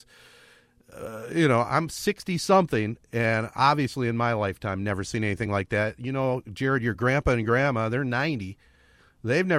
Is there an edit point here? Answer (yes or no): no